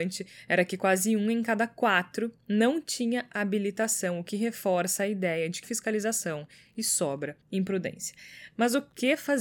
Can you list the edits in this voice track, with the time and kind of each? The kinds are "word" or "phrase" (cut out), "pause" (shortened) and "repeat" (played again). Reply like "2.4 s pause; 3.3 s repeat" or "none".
5.6 s word; 7.4 s pause